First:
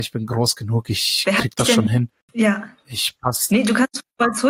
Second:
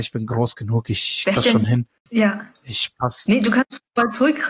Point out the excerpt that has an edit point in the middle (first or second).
second